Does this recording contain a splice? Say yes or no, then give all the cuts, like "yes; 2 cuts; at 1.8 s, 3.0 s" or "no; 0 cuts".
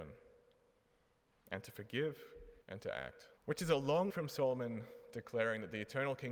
yes; 3 cuts; at 2.6 s, 3.4 s, 4.1 s